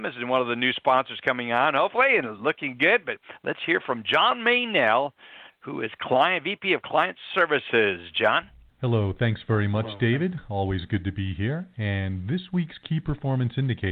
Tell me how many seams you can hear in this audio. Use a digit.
0